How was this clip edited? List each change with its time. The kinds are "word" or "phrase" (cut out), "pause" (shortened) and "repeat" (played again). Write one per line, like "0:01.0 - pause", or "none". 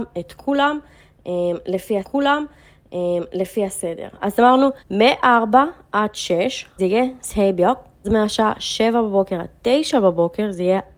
0:02.0 - repeat
0:04.8 - pause
0:06.8 - phrase
0:08.0 - phrase